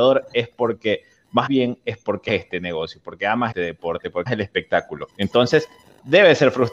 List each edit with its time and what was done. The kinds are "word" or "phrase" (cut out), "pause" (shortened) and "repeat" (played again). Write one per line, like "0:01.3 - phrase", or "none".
0:01.5 - phrase
0:02.3 - word
0:03.5 - word
0:04.3 - word
0:05.1 - pause